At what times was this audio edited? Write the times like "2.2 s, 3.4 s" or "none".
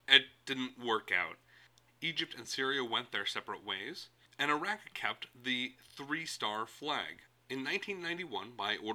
none

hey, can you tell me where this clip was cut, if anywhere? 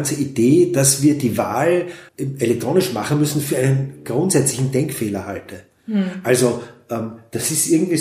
2.1 s

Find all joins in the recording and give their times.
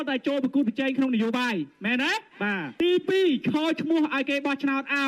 2.3 s

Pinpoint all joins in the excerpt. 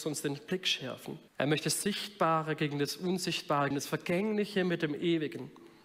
1.3 s, 3.7 s

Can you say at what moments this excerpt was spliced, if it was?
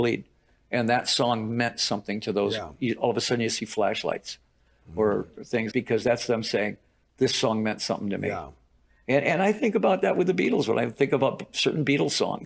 5.7 s

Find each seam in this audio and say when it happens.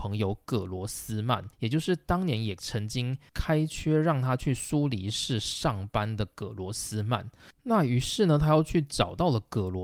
1.5 s

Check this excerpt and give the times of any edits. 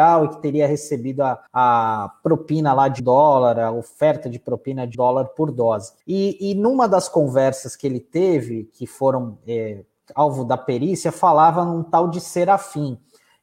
1.5 s, 3.0 s, 4.9 s, 6.0 s

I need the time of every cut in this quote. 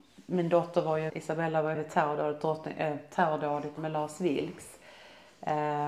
1.1 s, 1.7 s, 3.8 s

